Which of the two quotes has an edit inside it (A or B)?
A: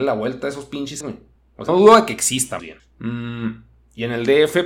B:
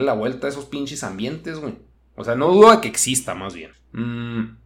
A